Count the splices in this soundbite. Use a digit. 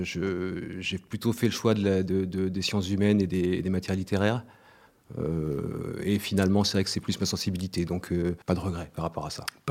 1